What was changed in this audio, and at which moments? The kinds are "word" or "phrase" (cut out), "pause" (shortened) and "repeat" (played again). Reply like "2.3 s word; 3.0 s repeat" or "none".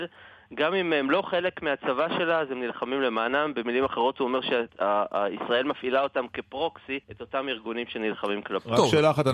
4.7 s pause; 7.0 s pause